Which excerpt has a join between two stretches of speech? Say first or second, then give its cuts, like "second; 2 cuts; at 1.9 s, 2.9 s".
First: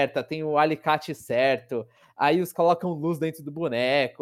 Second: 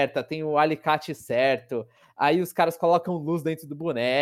first; 1 cut; at 2.5 s